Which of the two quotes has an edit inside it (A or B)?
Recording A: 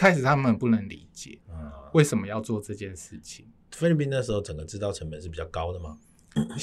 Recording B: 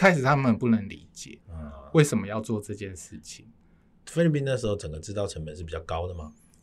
A